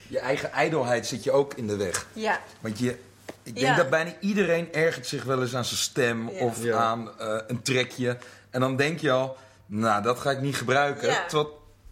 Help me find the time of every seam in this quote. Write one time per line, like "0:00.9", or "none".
none